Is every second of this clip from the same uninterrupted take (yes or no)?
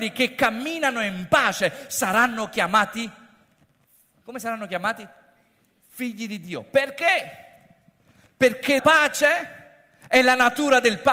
no